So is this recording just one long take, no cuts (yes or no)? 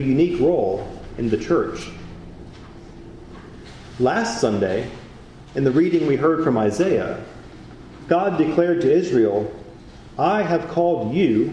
yes